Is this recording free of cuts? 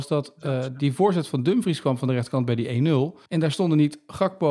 no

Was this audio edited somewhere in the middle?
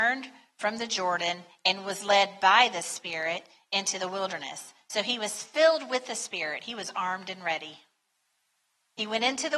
no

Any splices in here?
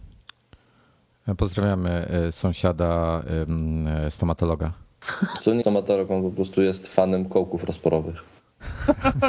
yes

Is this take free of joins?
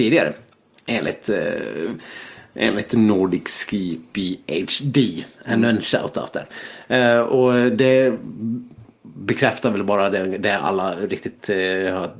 yes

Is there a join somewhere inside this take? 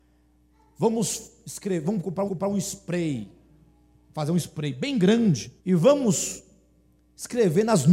yes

